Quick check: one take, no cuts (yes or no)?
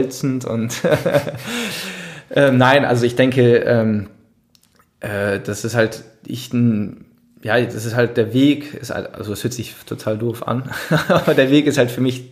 yes